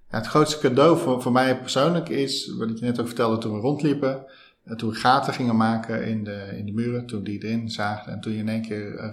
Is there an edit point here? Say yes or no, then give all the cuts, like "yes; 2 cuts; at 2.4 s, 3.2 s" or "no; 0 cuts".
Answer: no; 0 cuts